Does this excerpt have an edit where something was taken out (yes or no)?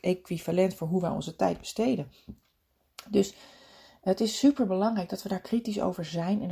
no